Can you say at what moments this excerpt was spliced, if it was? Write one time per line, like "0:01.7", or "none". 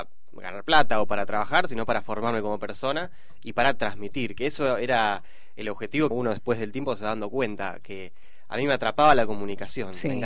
0:06.1